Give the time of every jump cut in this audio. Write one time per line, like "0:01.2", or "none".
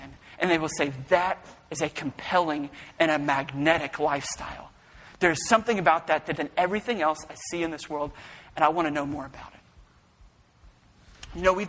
0:06.3